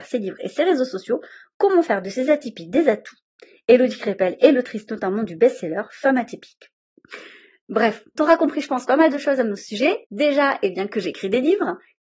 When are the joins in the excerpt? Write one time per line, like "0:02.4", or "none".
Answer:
0:08.2
0:10.0